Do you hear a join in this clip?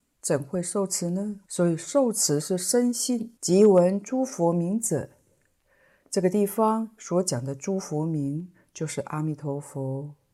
yes; 2 cuts; at 1.5 s, 3.4 s

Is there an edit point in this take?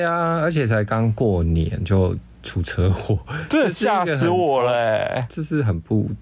no; 0 cuts

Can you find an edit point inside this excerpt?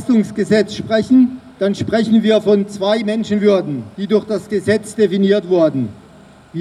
yes; 2 cuts; at 1.5 s, 3.9 s

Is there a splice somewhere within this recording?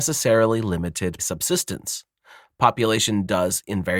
yes; 1 cut; at 1.2 s

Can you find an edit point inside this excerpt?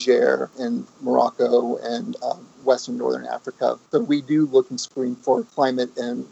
yes; 2 cuts; at 2.6 s, 3.9 s

